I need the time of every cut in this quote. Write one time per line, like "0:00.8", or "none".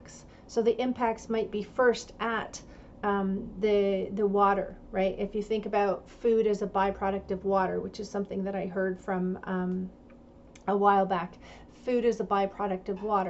none

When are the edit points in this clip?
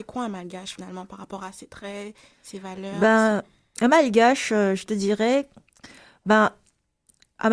none

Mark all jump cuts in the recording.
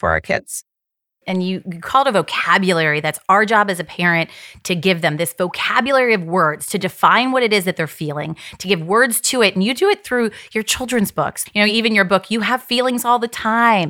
none

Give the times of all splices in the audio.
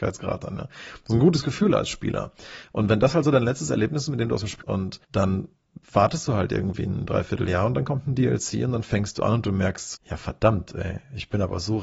0:04.6
0:05.0
0:09.9

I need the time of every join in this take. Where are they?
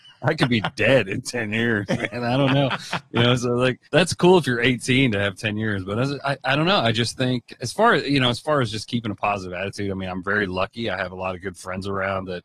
0:03.8

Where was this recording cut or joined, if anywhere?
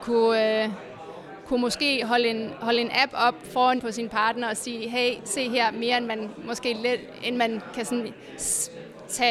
0:03.8

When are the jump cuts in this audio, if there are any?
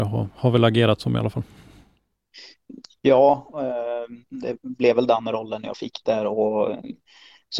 0:04.3

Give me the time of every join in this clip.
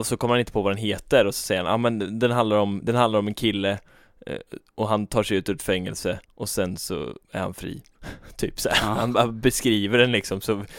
0:06.2
0:07.2

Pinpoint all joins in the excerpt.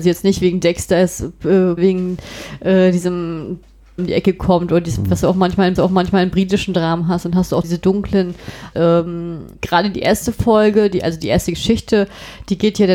0:01.8
0:04.0
0:05.8
0:07.6
0:08.7
0:09.5

